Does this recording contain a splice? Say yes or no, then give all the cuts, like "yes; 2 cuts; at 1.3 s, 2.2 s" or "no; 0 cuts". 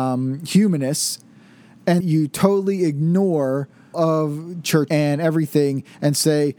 yes; 3 cuts; at 2.0 s, 3.9 s, 4.9 s